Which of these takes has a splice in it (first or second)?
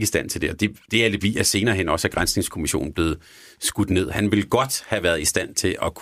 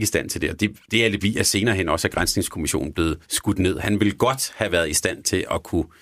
second